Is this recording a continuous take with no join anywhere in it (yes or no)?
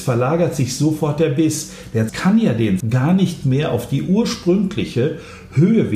no